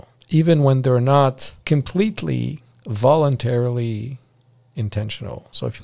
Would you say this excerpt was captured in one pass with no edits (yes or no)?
no